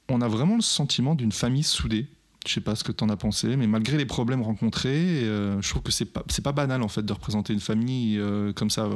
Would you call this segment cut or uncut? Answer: uncut